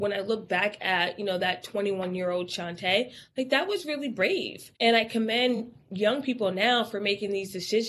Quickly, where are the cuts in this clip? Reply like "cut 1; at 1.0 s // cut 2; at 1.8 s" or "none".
cut 1; at 4.7 s